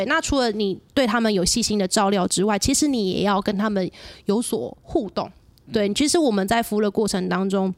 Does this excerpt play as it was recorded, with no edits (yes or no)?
yes